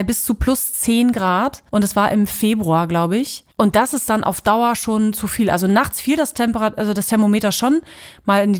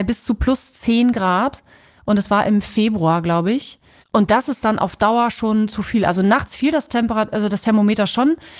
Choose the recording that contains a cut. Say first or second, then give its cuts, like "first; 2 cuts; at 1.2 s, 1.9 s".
first; 2 cuts; at 1.7 s, 3.5 s